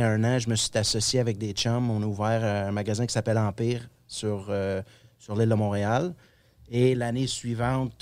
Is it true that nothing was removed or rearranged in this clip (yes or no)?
yes